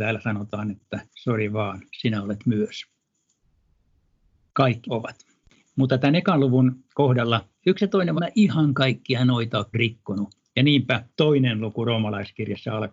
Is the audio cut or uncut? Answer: cut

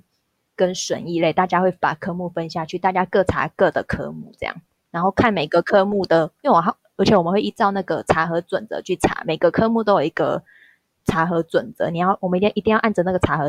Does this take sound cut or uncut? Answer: uncut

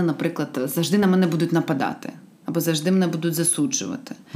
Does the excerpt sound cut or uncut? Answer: uncut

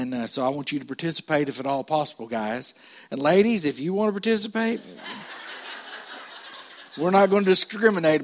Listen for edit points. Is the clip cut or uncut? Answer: uncut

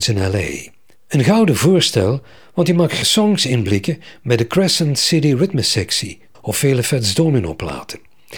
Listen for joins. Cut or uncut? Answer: cut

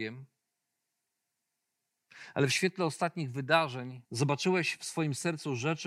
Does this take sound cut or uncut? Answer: cut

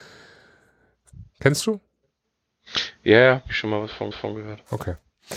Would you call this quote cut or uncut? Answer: cut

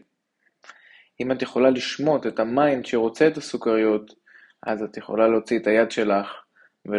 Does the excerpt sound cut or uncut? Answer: uncut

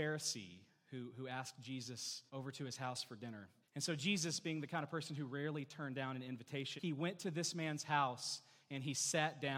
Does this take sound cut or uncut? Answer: cut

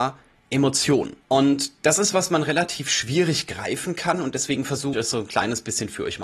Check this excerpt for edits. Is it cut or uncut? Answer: cut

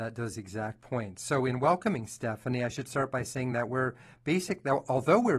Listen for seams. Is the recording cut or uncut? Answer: uncut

